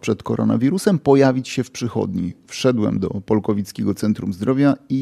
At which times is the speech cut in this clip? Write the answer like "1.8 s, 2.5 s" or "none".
none